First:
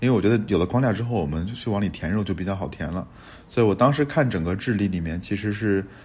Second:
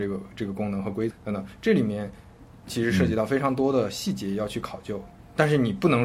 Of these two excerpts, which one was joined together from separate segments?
second; 1 cut; at 1.1 s

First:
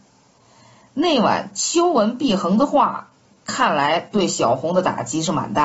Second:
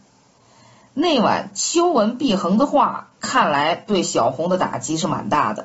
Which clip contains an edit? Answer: second; 1 cut; at 3.2 s

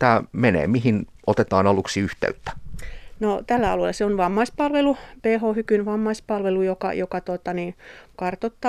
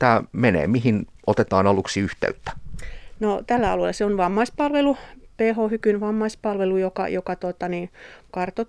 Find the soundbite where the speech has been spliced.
first; 1 cut; at 5.2 s

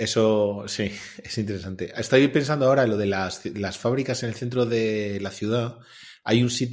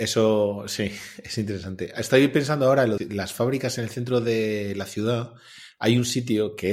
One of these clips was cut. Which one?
second; 1 cut; at 3.0 s

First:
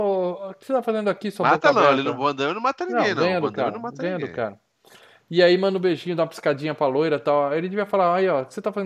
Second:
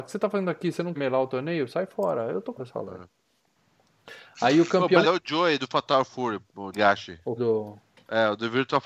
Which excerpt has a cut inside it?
second; 5 cuts; at 0.9 s, 2.6 s, 5.0 s, 6.7 s, 7.4 s

